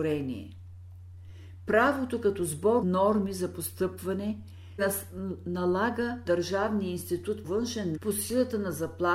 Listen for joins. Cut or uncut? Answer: cut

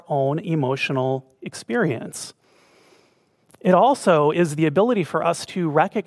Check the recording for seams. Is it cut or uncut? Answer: uncut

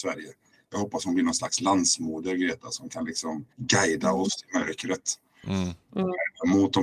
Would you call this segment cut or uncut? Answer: cut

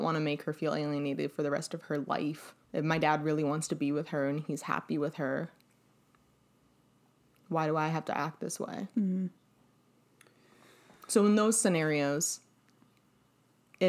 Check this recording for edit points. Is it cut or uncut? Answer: cut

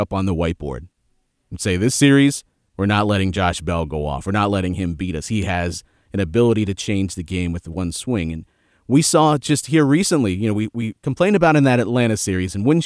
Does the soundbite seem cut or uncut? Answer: uncut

